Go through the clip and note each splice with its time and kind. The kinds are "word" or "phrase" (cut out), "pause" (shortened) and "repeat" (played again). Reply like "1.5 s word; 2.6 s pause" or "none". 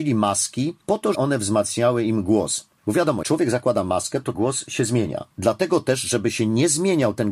1.1 s word; 3.2 s word; 4.3 s word; 5.3 s pause